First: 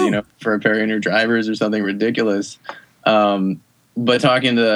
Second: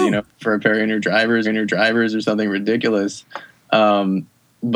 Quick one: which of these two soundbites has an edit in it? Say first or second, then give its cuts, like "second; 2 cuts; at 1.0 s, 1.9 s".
second; 1 cut; at 1.4 s